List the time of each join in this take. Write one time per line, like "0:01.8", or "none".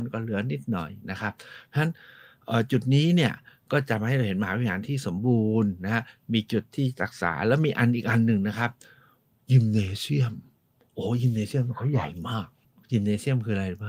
none